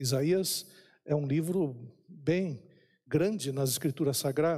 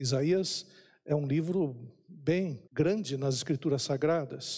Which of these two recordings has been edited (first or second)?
second